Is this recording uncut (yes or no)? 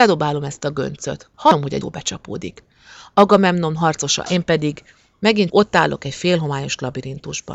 no